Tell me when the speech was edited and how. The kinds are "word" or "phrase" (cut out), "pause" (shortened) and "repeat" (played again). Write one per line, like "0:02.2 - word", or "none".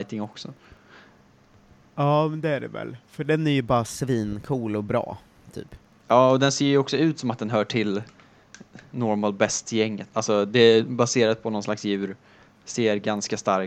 none